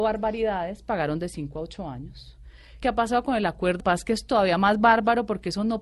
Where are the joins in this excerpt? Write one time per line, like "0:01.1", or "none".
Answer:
0:02.8
0:03.8